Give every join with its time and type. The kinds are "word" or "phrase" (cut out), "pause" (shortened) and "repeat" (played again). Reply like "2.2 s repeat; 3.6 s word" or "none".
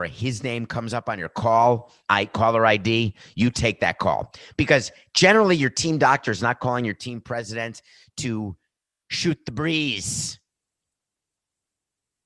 2.0 s pause